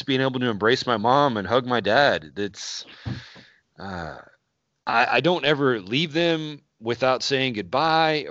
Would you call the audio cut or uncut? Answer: uncut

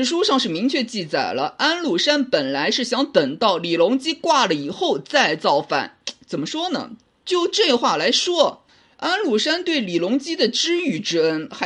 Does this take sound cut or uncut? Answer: uncut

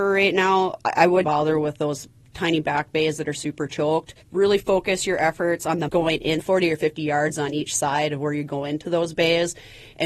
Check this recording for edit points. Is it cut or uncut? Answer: cut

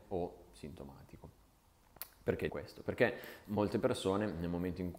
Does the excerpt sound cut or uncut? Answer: cut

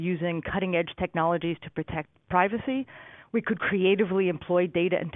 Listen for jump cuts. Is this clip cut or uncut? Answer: uncut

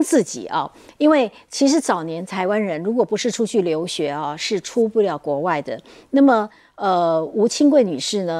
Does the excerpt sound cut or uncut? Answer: uncut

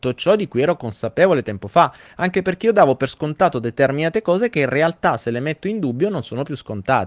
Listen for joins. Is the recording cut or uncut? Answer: uncut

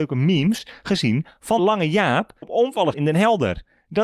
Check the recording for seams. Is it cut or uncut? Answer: cut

